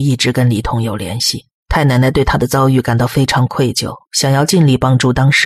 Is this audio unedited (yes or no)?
no